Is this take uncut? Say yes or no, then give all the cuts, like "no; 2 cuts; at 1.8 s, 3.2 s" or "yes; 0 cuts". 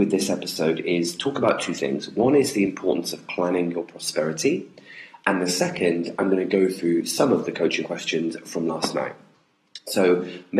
yes; 0 cuts